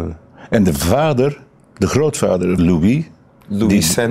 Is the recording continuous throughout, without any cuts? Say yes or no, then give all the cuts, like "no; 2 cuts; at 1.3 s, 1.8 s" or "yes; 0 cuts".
no; 1 cut; at 2.6 s